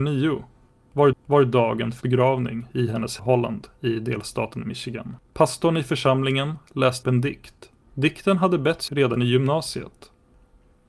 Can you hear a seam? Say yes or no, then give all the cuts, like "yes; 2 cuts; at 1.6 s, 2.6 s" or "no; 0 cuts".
yes; 7 cuts; at 1.1 s, 2.0 s, 3.2 s, 5.3 s, 7.0 s, 7.8 s, 8.9 s